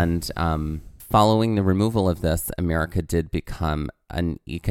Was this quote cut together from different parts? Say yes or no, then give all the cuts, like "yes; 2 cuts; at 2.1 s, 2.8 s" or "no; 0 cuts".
no; 0 cuts